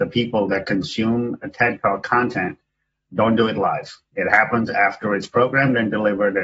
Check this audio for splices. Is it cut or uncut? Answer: uncut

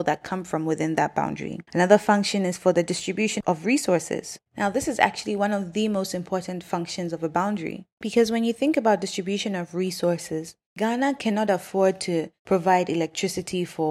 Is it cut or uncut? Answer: cut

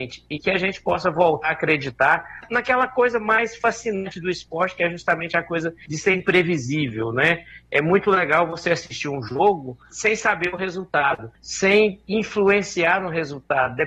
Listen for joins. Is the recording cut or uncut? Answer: uncut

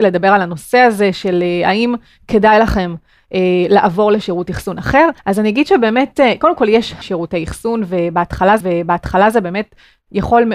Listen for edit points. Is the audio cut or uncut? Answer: cut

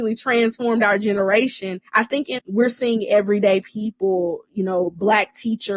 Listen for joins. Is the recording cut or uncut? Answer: cut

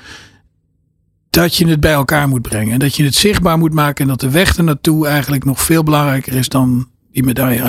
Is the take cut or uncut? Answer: uncut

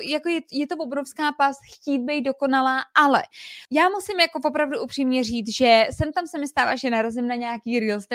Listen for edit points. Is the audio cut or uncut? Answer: cut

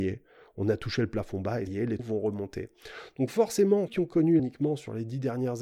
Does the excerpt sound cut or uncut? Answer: cut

